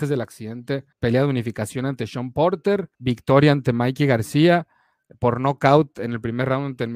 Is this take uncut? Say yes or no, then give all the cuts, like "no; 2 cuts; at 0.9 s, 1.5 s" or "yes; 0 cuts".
no; 2 cuts; at 0.9 s, 2.9 s